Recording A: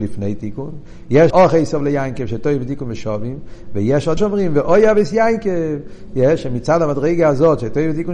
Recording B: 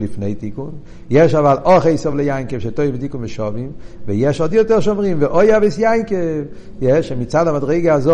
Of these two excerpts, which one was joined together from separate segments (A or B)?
A